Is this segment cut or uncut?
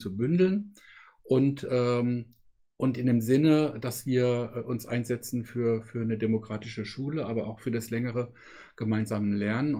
uncut